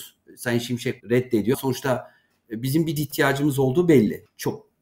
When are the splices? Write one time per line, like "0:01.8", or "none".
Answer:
0:01.0
0:01.5
0:03.0